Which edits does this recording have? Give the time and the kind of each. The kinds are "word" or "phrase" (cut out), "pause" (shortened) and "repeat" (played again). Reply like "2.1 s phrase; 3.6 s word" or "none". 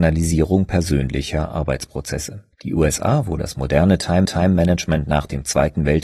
2.5 s pause; 4.3 s repeat